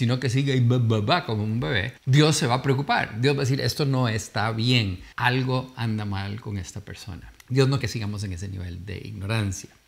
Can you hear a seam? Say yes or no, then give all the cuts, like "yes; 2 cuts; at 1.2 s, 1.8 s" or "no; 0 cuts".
yes; 4 cuts; at 2.0 s, 5.1 s, 7.4 s, 7.8 s